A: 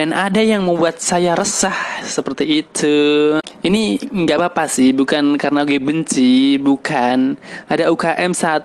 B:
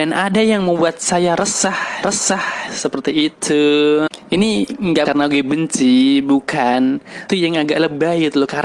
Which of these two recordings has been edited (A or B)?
B